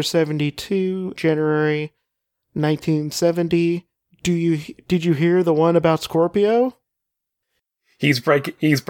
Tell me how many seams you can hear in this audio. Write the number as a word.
one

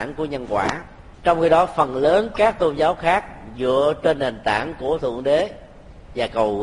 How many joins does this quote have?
one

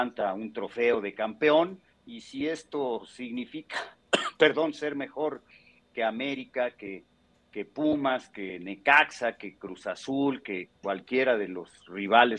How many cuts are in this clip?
two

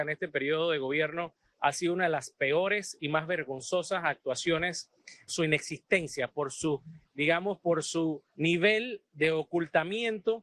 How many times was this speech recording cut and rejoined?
two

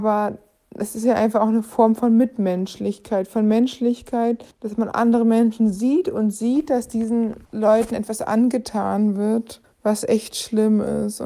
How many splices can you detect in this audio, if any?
three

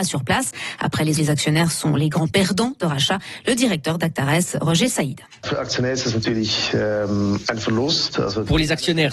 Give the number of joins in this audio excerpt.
two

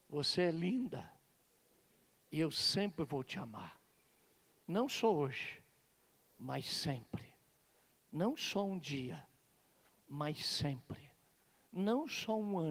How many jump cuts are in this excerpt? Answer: zero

